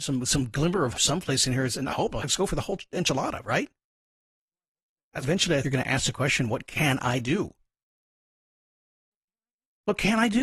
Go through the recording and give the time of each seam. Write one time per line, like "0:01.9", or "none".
0:00.9
0:01.9
0:02.2
0:05.2
0:05.6